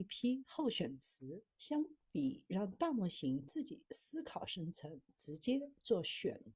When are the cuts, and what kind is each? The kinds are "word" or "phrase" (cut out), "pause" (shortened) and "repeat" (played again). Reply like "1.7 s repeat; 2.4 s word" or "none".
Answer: 1.5 s pause